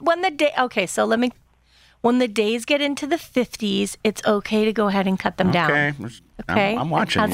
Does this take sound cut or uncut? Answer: uncut